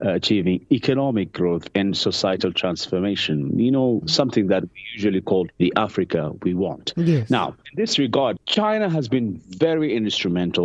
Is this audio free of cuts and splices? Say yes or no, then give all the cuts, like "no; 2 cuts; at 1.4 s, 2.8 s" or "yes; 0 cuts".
yes; 0 cuts